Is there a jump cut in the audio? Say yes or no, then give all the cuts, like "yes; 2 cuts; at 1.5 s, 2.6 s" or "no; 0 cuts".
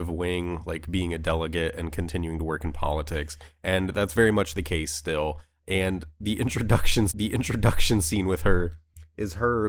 yes; 1 cut; at 7.1 s